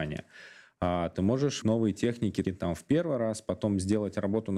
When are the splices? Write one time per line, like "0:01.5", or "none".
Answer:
0:01.6
0:02.4